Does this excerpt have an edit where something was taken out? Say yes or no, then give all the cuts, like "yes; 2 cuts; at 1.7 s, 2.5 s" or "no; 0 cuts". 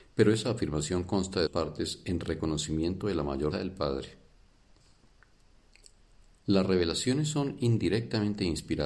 yes; 2 cuts; at 1.5 s, 3.5 s